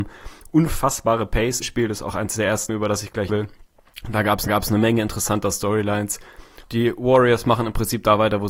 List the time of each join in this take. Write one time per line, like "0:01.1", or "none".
0:01.6
0:02.7
0:03.3
0:04.5
0:06.6